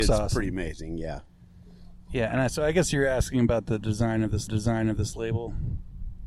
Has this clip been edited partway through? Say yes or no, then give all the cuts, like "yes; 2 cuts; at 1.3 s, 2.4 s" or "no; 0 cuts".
yes; 1 cut; at 4.5 s